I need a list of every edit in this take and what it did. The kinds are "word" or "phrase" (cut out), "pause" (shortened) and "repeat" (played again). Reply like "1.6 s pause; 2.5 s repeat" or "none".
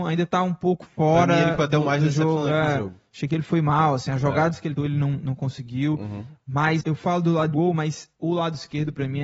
4.8 s word; 6.8 s word; 7.5 s phrase; 8.1 s pause

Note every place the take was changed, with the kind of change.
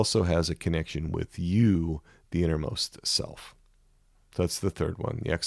none

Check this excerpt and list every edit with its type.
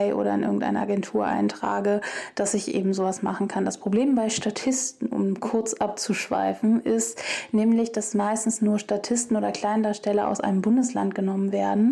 none

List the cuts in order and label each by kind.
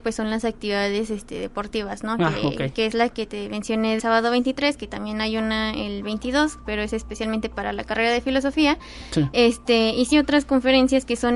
4.0 s word; 10.1 s word

